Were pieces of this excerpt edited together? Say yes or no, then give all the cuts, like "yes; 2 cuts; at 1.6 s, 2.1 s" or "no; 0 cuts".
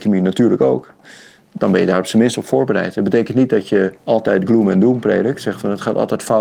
yes; 1 cut; at 4.0 s